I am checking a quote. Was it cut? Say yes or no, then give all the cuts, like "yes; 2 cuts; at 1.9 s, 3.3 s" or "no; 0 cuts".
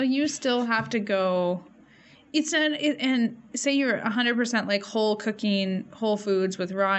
no; 0 cuts